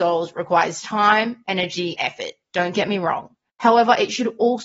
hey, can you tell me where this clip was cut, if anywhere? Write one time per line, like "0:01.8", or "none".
0:02.0
0:03.5